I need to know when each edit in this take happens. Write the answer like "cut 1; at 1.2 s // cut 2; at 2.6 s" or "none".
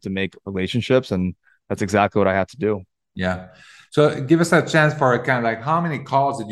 none